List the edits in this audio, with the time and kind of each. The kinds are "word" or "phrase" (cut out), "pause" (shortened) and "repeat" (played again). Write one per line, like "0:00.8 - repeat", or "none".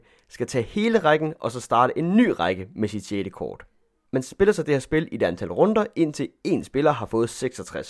none